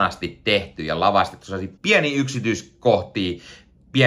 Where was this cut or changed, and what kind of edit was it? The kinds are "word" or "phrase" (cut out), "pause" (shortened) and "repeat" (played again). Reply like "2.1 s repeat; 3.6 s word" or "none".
1.8 s pause